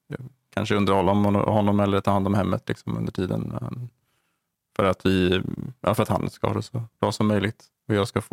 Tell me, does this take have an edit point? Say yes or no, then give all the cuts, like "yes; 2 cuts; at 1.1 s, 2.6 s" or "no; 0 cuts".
no; 0 cuts